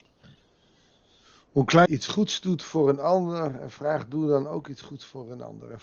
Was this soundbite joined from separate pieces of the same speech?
yes; 1 cut; at 1.9 s

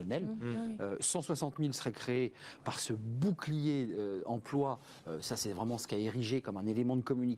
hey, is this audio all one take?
yes; 0 cuts

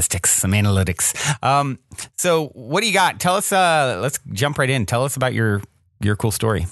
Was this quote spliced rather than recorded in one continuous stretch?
no; 0 cuts

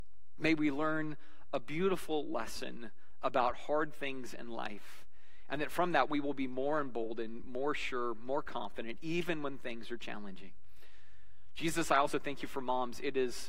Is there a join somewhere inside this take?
no; 0 cuts

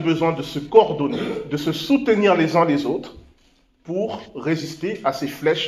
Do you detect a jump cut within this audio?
no; 0 cuts

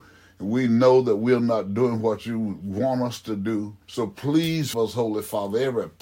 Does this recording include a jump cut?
yes; 2 cuts; at 3.8 s, 4.7 s

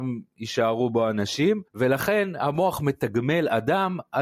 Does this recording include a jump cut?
yes; 1 cut; at 1.7 s

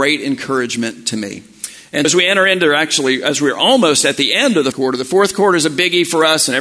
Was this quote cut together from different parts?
yes; 2 cuts; at 2.0 s, 4.7 s

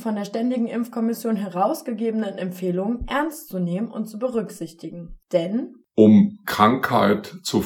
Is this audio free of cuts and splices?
no; 1 cut; at 5.2 s

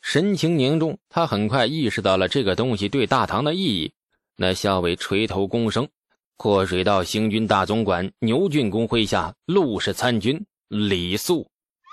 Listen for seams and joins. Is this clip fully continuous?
yes; 0 cuts

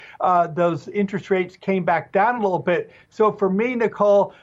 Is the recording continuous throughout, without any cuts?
yes; 0 cuts

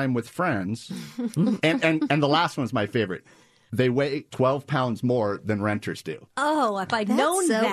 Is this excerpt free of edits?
yes; 0 cuts

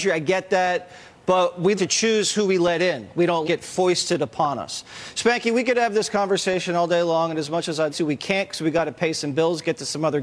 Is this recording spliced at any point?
yes; 3 cuts; at 1.8 s, 3.4 s, 7.9 s

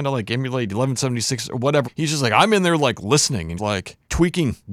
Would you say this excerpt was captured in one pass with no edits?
no; 1 cut; at 3.6 s

